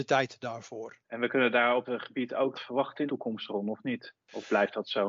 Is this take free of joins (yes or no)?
no